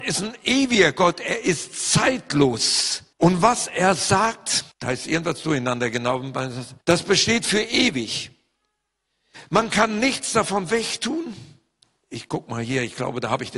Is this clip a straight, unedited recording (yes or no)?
no